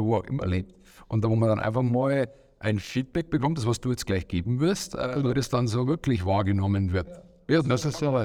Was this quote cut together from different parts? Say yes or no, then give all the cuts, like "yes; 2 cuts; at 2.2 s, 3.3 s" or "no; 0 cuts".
no; 0 cuts